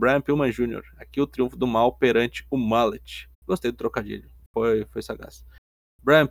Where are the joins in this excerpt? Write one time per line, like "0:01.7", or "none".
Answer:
0:03.3